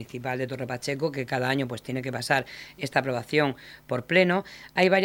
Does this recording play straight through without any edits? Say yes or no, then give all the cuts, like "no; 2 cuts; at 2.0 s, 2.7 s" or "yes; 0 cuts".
yes; 0 cuts